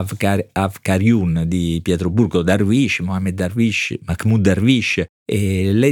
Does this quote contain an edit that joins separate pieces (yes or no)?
no